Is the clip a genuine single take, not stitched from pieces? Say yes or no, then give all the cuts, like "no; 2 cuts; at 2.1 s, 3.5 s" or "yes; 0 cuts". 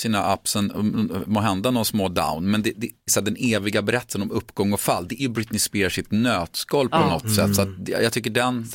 no; 2 cuts; at 3.1 s, 5.2 s